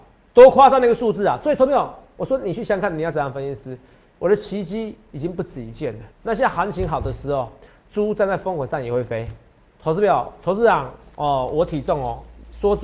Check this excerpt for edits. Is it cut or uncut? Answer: cut